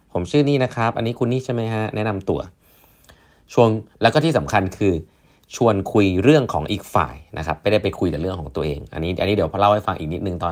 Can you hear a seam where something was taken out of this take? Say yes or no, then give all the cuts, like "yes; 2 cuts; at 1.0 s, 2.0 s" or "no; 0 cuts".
no; 0 cuts